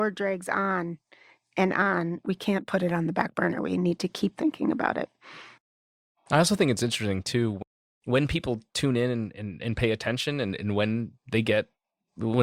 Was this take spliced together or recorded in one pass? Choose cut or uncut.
uncut